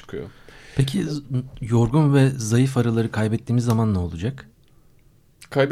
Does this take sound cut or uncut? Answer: uncut